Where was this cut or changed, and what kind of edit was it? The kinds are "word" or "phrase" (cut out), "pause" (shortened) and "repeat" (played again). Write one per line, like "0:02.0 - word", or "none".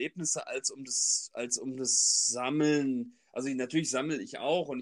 none